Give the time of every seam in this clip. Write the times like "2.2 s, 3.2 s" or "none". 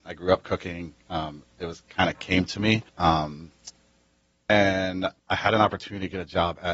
1.4 s, 2.9 s, 5.2 s